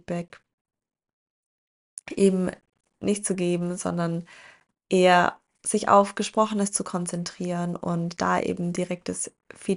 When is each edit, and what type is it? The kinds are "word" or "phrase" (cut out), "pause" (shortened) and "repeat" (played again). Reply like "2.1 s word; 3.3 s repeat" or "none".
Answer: none